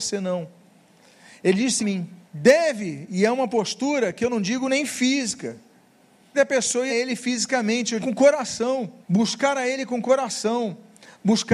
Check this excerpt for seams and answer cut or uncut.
cut